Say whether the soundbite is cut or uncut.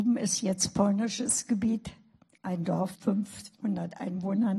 cut